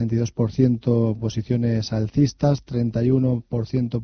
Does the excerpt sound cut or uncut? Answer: uncut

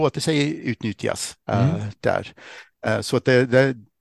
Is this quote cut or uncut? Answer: cut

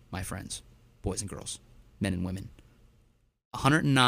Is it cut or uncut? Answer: uncut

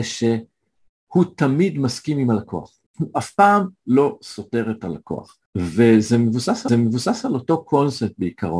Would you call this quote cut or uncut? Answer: cut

